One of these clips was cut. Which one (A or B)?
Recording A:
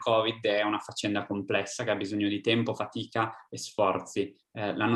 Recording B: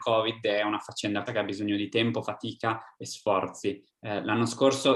B